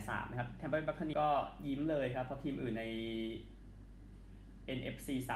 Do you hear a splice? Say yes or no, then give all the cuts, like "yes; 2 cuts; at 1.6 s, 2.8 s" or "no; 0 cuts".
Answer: yes; 1 cut; at 1.1 s